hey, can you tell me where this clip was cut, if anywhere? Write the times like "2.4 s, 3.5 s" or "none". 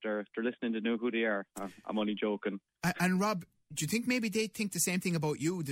none